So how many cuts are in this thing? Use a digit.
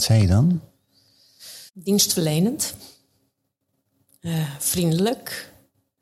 1